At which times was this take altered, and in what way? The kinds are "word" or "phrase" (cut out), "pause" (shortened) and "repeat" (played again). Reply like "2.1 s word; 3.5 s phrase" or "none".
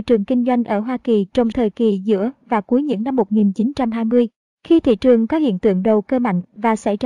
1.5 s word